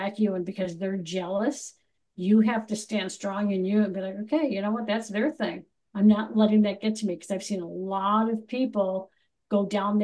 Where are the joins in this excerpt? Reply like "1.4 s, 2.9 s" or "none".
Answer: none